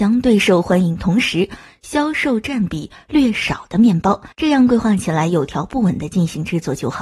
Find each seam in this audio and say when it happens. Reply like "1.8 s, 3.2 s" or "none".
4.3 s

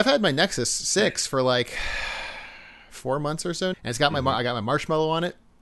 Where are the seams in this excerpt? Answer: 3.7 s

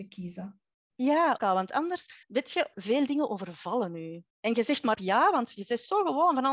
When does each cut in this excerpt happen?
1.4 s, 2.2 s, 2.7 s, 4.3 s, 4.9 s

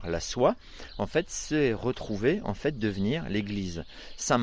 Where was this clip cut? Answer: none

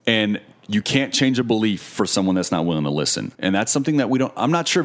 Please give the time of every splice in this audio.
3.3 s

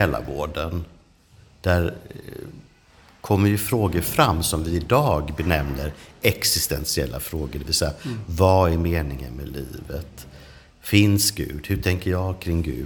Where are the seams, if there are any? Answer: none

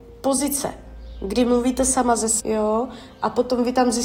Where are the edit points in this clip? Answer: 2.4 s

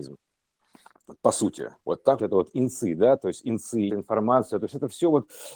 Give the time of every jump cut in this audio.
1.8 s, 2.2 s, 3.9 s

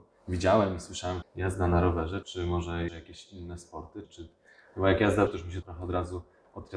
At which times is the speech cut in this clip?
1.2 s, 2.2 s, 2.9 s, 4.0 s, 5.3 s, 5.6 s

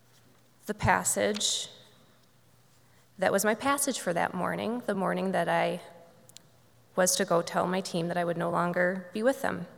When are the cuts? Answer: none

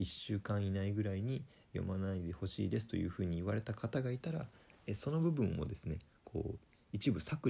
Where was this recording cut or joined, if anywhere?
none

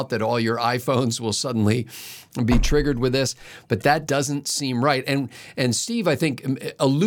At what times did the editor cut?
4.1 s

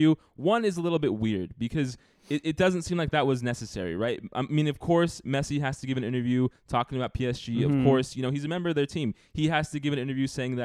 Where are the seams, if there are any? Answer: none

